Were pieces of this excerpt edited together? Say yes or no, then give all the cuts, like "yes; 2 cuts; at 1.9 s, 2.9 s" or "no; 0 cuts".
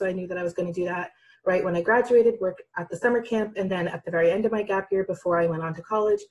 no; 0 cuts